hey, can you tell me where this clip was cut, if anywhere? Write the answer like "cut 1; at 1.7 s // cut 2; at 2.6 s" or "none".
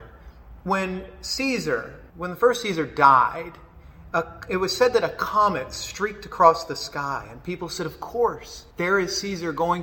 cut 1; at 2.1 s // cut 2; at 8.7 s